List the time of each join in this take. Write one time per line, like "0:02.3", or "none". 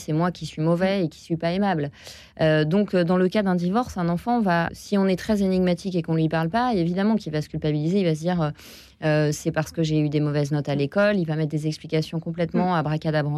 0:04.7

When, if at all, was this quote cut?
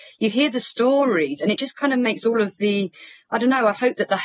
none

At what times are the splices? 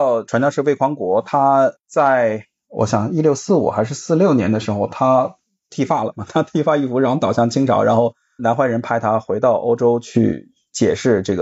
none

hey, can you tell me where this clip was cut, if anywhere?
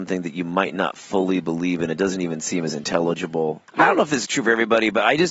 0:03.7

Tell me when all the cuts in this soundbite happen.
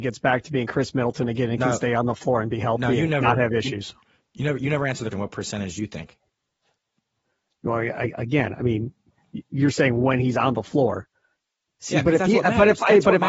0:05.1

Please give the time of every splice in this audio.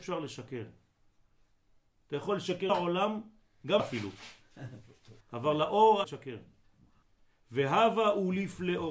0:02.7
0:03.8
0:05.2
0:06.0
0:07.0

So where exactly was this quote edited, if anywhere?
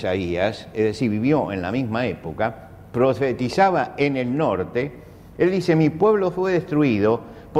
none

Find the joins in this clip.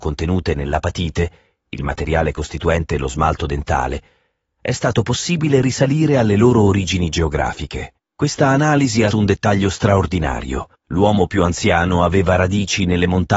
0:08.0
0:09.1
0:10.8

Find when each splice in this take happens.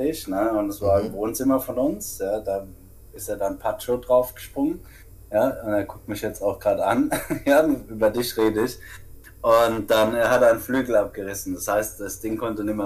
none

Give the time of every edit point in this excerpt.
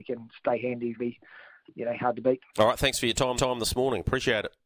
0:01.0
0:02.5
0:03.4

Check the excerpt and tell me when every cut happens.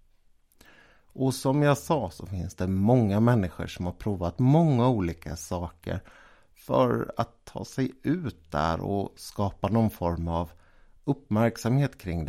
none

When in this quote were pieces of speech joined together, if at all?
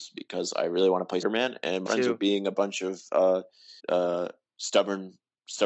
0:01.2
0:01.9
0:03.8

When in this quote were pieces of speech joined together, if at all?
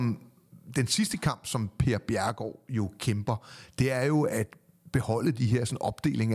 none

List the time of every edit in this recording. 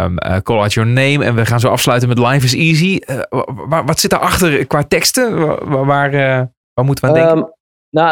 0:04.7

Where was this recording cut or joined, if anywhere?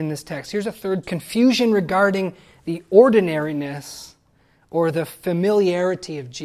0:01.0

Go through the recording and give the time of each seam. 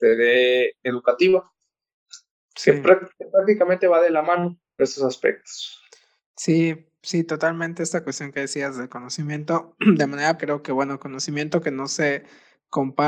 0:04.8
0:10.4

